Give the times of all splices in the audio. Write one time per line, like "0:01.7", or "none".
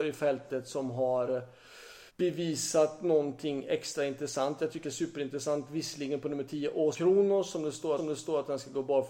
0:02.1
0:04.8
0:06.9
0:08.0